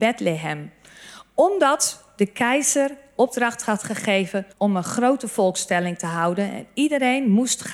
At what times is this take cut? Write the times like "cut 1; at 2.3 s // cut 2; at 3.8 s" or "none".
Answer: cut 1; at 4.5 s